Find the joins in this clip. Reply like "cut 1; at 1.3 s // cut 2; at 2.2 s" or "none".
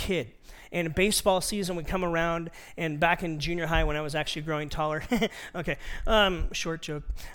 none

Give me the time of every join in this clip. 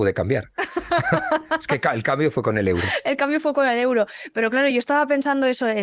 none

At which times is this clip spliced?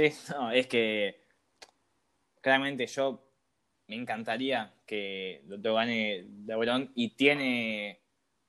none

